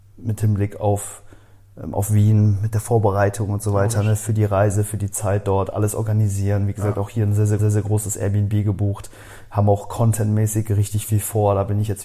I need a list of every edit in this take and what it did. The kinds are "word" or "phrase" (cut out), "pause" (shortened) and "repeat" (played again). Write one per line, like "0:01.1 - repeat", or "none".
0:07.6 - repeat

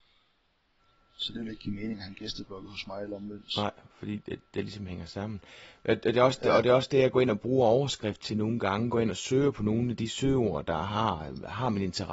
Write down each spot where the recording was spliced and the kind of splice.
0:03.9 - pause

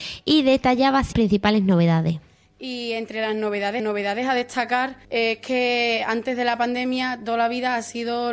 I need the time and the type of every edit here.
0:01.1 - word
0:03.8 - repeat
0:05.0 - pause

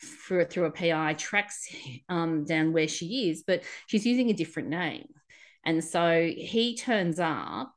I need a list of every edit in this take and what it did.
none

